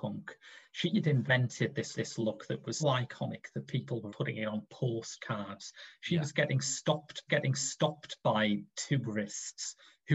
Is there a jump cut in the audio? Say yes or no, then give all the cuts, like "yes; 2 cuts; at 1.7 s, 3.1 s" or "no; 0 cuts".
yes; 4 cuts; at 1.9 s, 2.8 s, 4.1 s, 7.3 s